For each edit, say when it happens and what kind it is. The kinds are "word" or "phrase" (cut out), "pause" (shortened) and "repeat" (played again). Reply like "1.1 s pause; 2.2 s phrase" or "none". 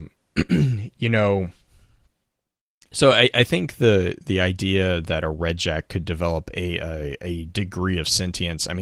none